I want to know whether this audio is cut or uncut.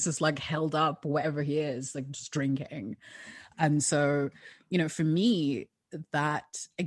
uncut